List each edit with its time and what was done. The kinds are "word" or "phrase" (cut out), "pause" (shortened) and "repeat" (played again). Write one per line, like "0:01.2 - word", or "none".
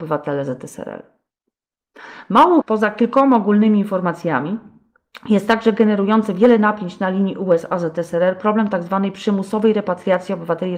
0:02.6 - word